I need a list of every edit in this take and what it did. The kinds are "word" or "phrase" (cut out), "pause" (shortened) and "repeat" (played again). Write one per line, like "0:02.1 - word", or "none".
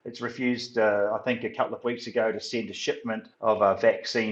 0:03.3 - pause